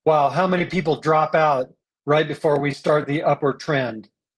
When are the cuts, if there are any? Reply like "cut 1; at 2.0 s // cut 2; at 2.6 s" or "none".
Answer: none